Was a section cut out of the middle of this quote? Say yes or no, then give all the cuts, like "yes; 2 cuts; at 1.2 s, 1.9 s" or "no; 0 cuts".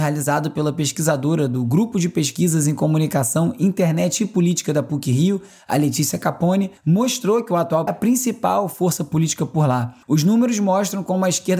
yes; 3 cuts; at 6.8 s, 7.9 s, 10.0 s